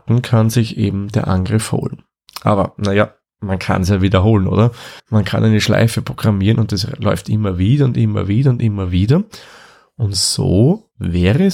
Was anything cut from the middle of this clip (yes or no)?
yes